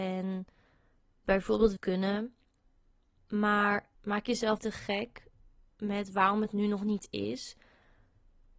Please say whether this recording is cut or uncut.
cut